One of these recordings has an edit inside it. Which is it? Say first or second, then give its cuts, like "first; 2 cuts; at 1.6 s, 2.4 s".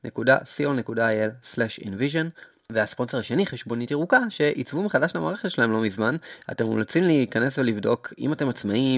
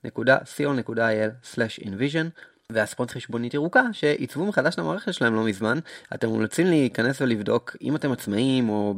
second; 1 cut; at 3.1 s